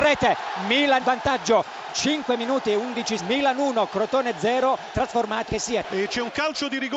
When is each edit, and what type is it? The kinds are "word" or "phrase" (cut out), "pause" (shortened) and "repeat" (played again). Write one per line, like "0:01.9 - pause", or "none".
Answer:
0:01.0 - word
0:01.9 - word
0:03.2 - word
0:04.9 - phrase
0:05.5 - word